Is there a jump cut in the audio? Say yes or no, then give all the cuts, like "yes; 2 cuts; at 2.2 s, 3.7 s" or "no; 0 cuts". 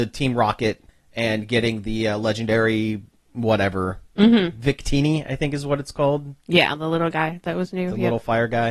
no; 0 cuts